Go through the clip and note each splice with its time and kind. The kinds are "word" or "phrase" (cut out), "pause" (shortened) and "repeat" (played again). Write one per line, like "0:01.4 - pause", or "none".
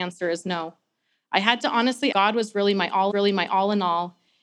0:02.1 - phrase
0:03.1 - repeat